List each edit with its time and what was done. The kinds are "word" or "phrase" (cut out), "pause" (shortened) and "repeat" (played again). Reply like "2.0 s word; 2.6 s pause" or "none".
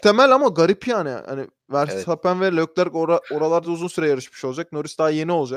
none